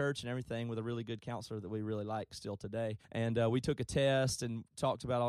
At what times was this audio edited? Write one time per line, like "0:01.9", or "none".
0:03.0

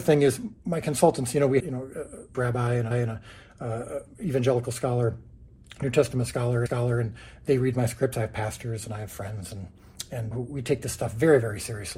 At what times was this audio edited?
0:01.6
0:02.3
0:02.9
0:06.7
0:10.3

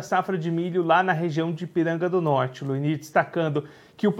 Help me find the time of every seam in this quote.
none

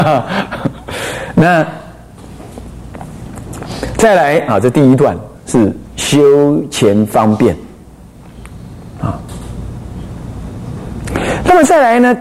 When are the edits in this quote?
0:05.4

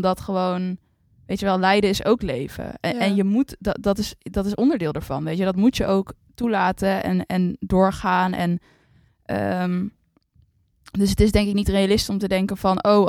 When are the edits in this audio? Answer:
none

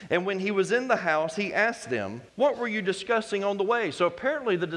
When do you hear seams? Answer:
0:02.3

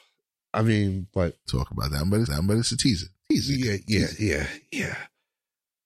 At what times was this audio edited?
0:01.5
0:02.3

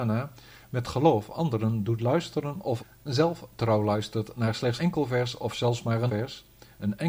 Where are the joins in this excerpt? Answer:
0:04.8
0:06.1

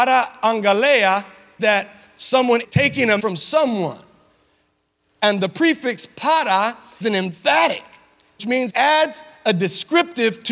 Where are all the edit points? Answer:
0:01.6
0:02.6
0:03.2
0:07.0
0:08.4
0:08.7

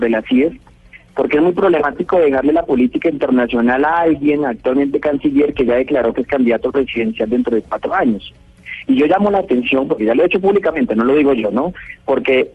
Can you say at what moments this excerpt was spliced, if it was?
none

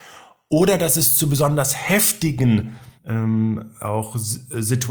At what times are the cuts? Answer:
0:03.0

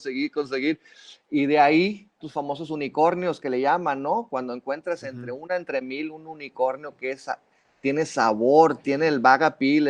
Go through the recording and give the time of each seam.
0:02.2

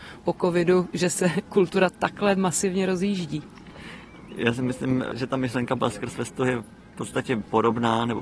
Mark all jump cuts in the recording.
none

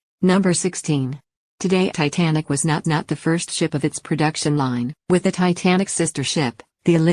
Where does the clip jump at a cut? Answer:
0:01.9
0:02.8
0:05.0

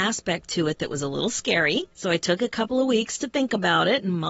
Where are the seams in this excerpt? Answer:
0:01.9

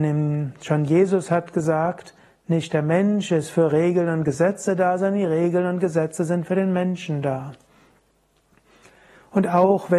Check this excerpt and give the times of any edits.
none

